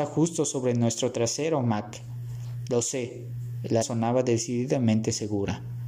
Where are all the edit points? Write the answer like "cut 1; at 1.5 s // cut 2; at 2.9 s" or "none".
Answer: cut 1; at 3.8 s